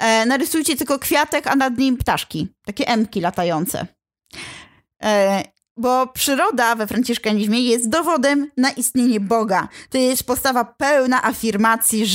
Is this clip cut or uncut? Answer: uncut